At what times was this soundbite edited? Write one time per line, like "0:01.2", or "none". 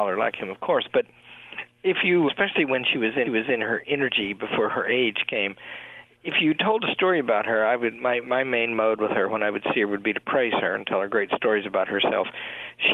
0:02.3
0:03.3